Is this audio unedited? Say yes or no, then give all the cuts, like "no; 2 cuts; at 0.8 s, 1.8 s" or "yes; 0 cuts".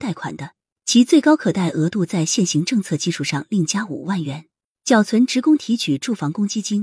yes; 0 cuts